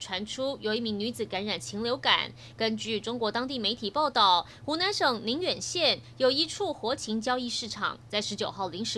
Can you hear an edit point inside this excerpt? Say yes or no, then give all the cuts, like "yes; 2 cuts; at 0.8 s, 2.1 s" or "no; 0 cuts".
no; 0 cuts